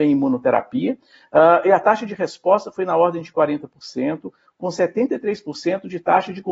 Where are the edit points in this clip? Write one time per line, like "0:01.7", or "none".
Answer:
none